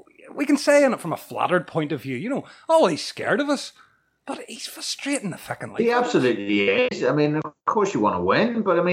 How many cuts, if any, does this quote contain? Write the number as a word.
zero